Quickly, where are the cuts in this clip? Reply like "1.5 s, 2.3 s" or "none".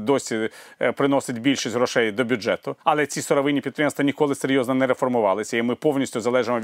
2.8 s